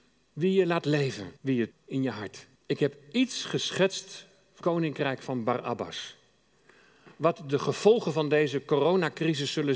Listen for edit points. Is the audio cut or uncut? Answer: cut